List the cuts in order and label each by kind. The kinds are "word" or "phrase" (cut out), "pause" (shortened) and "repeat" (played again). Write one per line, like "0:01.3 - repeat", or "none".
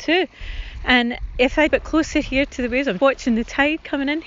0:01.7 - phrase
0:03.0 - word